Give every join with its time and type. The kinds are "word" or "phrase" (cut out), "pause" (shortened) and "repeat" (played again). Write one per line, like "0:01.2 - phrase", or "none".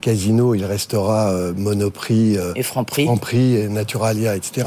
none